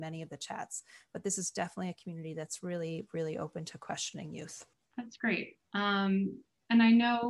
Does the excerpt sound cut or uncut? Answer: cut